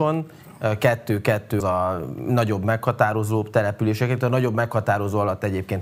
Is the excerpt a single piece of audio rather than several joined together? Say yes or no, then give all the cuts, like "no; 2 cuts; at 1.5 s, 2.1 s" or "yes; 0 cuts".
no; 1 cut; at 1.6 s